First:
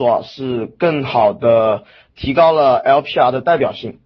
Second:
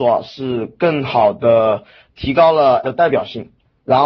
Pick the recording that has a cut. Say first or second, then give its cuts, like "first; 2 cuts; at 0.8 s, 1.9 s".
second; 1 cut; at 2.8 s